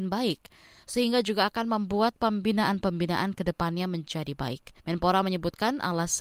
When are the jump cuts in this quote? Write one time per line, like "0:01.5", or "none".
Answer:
0:04.8